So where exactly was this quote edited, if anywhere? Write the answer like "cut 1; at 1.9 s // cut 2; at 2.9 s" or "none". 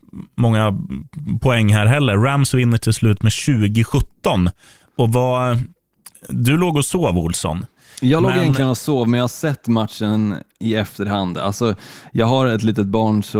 none